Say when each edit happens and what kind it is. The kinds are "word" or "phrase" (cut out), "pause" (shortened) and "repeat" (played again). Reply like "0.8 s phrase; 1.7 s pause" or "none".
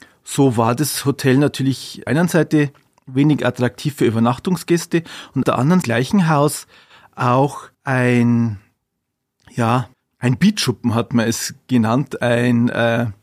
2.1 s phrase; 5.4 s word; 5.8 s phrase; 7.7 s pause; 9.9 s pause